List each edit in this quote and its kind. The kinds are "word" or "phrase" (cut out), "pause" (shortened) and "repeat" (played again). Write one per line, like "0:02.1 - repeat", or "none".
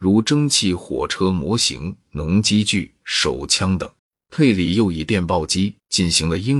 0:02.0 - phrase
0:04.0 - pause